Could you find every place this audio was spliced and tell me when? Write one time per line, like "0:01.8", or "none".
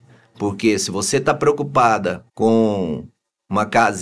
0:02.3